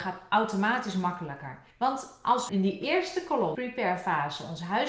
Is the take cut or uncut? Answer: cut